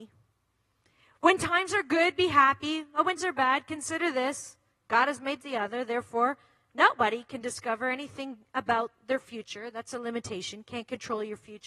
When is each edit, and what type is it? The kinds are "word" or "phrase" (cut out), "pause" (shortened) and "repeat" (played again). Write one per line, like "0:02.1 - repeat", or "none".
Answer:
0:03.2 - word
0:05.4 - phrase